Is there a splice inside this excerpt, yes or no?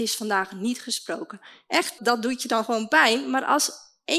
yes